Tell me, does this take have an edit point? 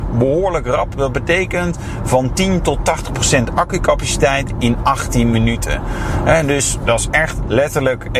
no; 0 cuts

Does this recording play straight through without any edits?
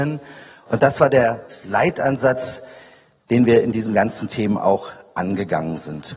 yes; 0 cuts

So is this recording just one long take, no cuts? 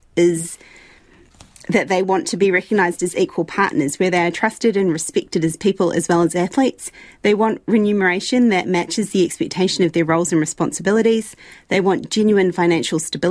yes; 0 cuts

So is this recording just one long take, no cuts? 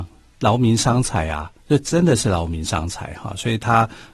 no; 1 cut; at 1.6 s

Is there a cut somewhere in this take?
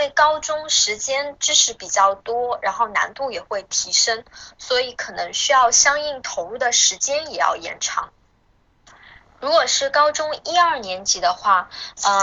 no; 0 cuts

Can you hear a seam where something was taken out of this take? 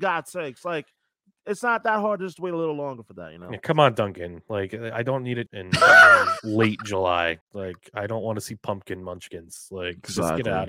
yes; 2 cuts; at 5.5 s, 7.4 s

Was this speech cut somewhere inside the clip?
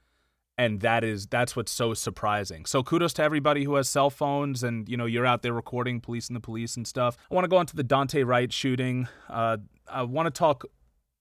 yes; 1 cut; at 7.2 s

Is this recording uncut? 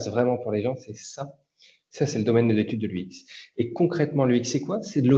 yes; 0 cuts

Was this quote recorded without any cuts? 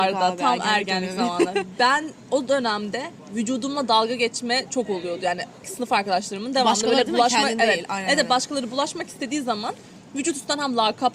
no; 1 cut; at 5.6 s

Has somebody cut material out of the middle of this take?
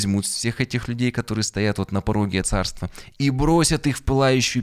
yes; 1 cut; at 2.4 s

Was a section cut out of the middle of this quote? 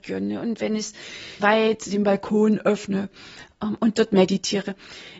yes; 1 cut; at 1.4 s

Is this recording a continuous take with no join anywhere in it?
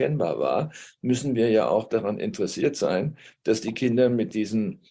yes; 0 cuts

